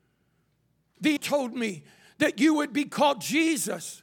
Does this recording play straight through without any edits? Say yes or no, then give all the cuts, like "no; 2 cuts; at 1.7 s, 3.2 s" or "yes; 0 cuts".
no; 1 cut; at 1.2 s